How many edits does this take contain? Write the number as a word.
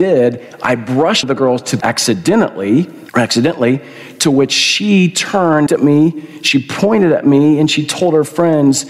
four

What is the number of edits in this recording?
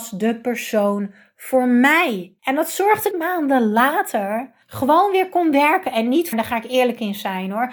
four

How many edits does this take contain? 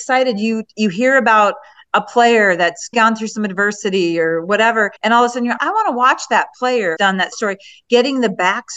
five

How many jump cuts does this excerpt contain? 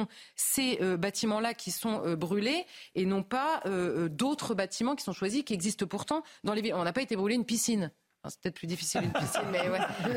zero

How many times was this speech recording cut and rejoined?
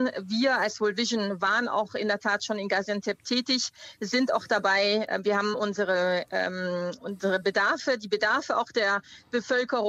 zero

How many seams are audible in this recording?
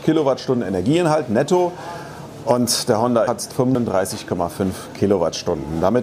one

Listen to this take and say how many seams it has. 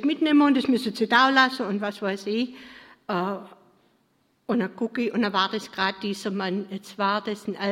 zero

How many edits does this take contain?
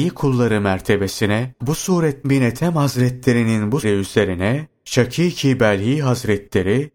three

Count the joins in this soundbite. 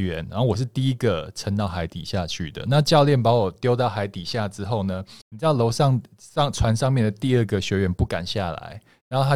one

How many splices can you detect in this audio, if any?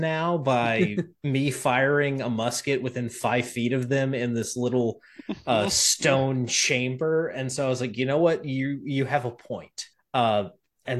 one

